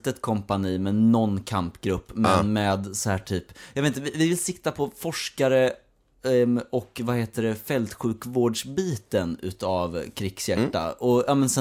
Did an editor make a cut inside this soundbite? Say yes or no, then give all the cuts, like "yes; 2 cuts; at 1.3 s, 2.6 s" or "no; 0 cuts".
no; 0 cuts